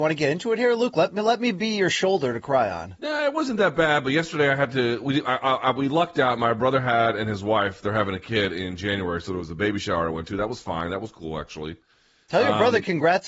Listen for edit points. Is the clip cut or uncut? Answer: uncut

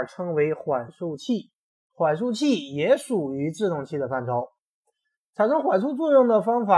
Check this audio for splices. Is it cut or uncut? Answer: uncut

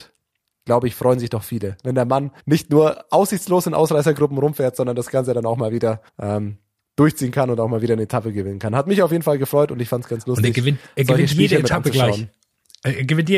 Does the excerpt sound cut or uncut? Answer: cut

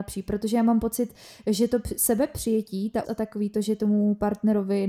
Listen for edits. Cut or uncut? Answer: cut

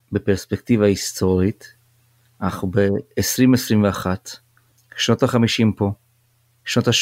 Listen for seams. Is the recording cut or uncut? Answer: uncut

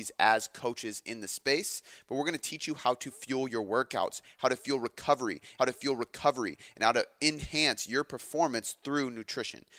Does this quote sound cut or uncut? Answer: cut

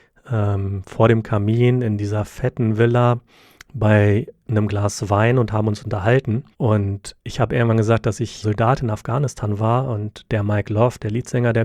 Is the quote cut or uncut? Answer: cut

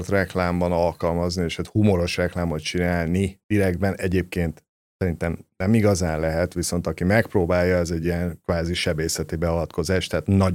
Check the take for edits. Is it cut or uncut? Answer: uncut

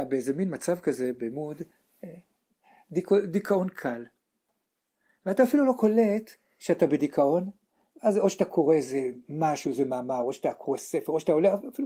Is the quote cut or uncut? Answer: uncut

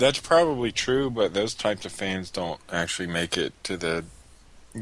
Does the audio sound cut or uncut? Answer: uncut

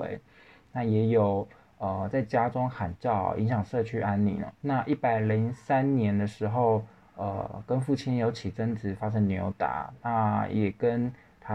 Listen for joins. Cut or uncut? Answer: cut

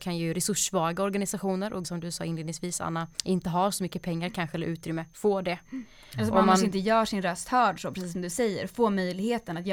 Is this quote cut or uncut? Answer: cut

